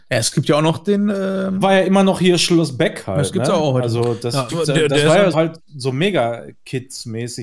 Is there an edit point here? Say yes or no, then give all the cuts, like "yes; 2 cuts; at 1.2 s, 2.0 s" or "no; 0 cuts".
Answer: yes; 3 cuts; at 1.6 s, 4.5 s, 5.3 s